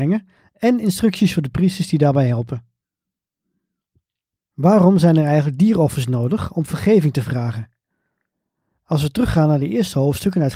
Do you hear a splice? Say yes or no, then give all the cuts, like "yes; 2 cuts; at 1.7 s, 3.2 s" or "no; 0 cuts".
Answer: no; 0 cuts